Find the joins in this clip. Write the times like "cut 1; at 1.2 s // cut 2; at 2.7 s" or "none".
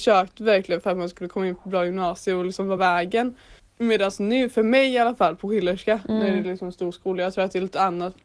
cut 1; at 2.8 s // cut 2; at 3.6 s